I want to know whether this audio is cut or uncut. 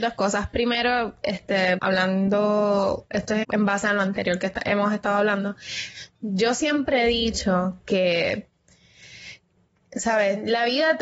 cut